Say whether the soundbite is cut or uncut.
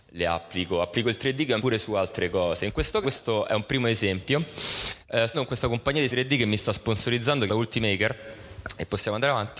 cut